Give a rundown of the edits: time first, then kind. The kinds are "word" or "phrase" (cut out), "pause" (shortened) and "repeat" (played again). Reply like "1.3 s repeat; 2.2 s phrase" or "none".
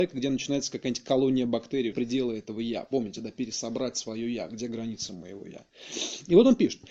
1.9 s phrase

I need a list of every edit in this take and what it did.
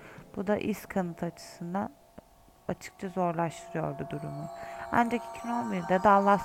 none

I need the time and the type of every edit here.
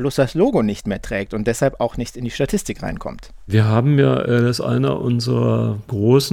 none

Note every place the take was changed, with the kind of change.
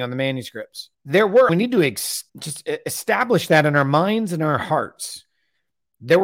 0.9 s pause; 1.5 s phrase; 2.3 s pause

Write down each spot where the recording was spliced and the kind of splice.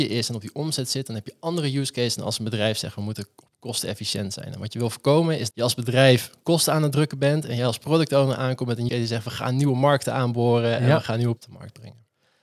5.5 s word; 8.9 s word; 11.4 s word

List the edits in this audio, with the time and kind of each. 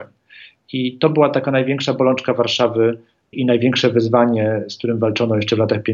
3.3 s word

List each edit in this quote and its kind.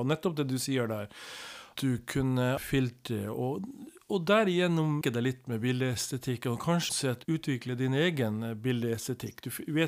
1.7 s word; 2.6 s word; 5.0 s word; 6.9 s word; 7.2 s word

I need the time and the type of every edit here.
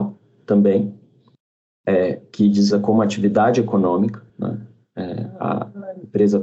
2.7 s phrase; 4.3 s pause

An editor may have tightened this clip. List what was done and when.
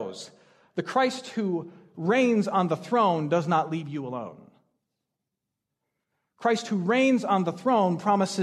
none

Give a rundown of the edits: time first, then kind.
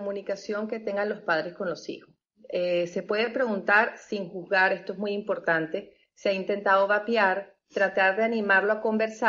none

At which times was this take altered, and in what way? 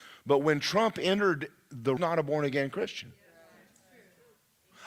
2.0 s phrase

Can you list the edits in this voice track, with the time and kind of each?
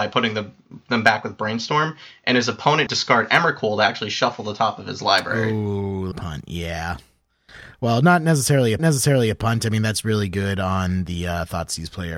2.9 s phrase; 6.1 s phrase; 8.8 s repeat

